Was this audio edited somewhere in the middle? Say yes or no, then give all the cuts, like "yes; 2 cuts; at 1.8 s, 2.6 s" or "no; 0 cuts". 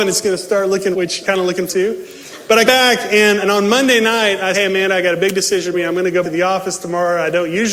yes; 8 cuts; at 0.9 s, 1.2 s, 1.7 s, 2.7 s, 3.4 s, 4.5 s, 5.7 s, 6.2 s